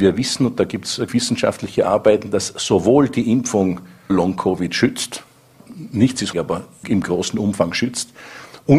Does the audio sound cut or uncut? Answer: cut